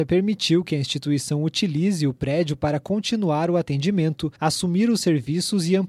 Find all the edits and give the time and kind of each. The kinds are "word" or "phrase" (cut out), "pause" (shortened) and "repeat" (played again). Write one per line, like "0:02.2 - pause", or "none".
0:04.4 - pause